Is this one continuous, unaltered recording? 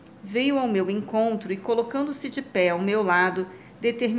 yes; 0 cuts

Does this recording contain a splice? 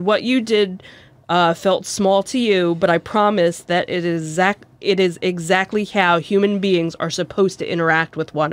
no; 0 cuts

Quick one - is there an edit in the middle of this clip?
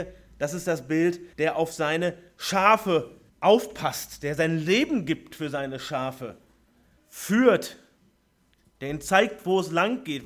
yes; 3 cuts; at 1.3 s, 3.3 s, 7.0 s

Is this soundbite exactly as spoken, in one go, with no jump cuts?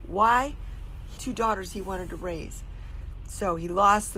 no; 1 cut; at 1.2 s

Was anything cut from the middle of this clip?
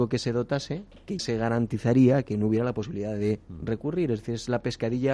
yes; 1 cut; at 1.2 s

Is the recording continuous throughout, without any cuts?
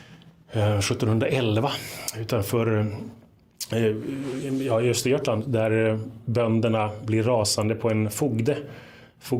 yes; 0 cuts

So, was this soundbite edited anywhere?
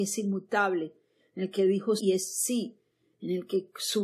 yes; 1 cut; at 2.0 s

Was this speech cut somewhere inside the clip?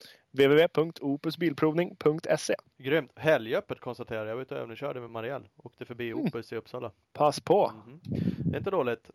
no; 0 cuts

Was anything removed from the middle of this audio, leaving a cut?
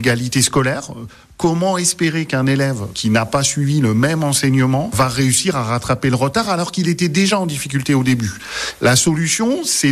no; 0 cuts

